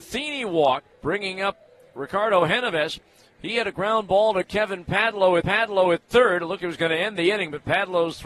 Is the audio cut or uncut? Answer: cut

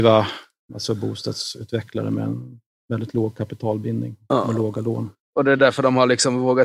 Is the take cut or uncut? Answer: uncut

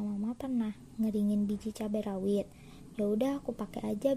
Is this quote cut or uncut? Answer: uncut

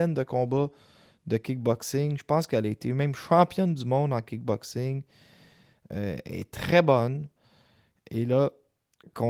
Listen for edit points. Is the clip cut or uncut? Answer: uncut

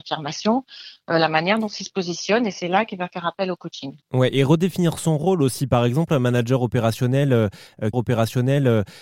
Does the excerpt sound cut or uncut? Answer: cut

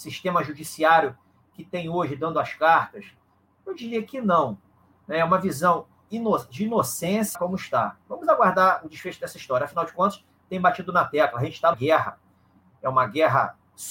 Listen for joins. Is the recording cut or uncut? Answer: cut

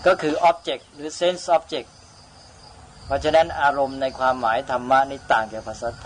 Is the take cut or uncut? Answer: uncut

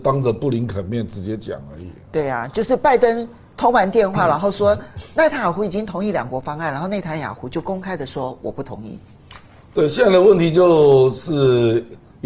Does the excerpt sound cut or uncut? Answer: uncut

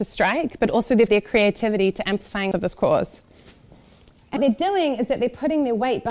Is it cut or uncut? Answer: cut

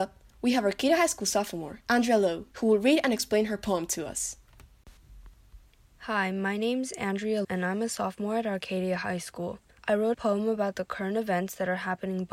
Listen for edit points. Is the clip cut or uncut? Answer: cut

